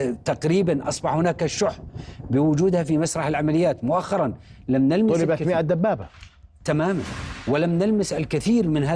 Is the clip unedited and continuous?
yes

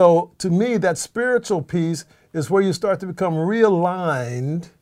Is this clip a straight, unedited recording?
yes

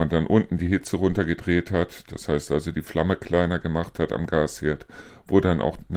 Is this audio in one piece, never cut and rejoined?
yes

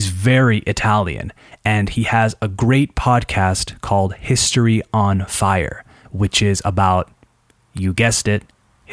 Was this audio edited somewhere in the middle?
no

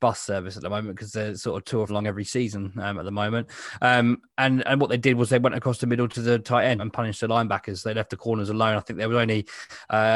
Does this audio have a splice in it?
yes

